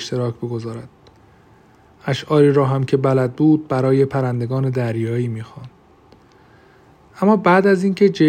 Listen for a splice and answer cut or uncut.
uncut